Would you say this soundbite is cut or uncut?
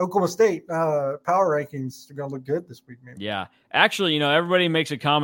uncut